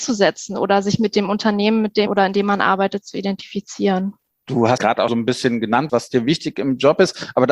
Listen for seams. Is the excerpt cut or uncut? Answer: cut